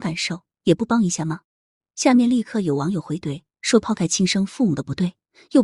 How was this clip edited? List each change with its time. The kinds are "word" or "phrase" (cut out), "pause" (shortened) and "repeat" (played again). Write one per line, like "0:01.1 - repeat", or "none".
0:01.4 - pause